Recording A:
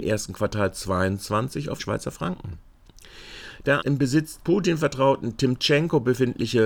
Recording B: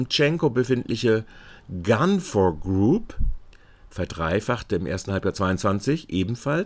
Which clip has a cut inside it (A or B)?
A